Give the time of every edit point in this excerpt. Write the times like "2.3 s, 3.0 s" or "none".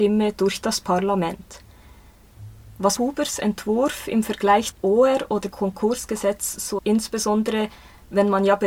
3.0 s, 4.7 s, 5.5 s, 6.8 s

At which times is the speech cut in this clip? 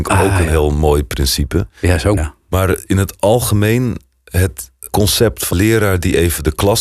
2.2 s, 4.9 s, 5.5 s

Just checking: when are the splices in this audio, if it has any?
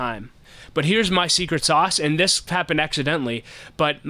2.5 s

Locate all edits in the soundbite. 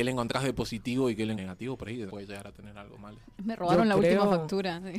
1.4 s, 2.1 s

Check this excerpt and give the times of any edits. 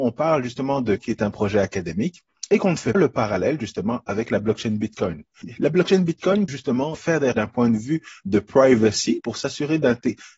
1.0 s, 2.9 s, 6.5 s, 6.9 s, 7.3 s, 9.2 s

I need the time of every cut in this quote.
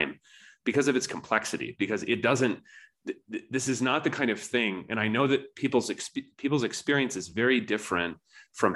none

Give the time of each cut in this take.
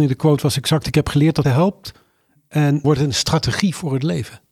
1.4 s, 2.8 s

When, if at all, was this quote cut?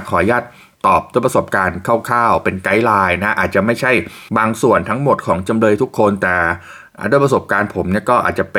4.3 s

